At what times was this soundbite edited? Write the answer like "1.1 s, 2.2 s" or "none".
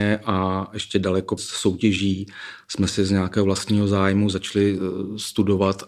1.4 s